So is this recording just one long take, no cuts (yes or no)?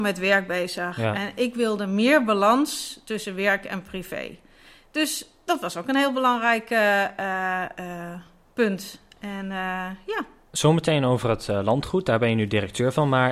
yes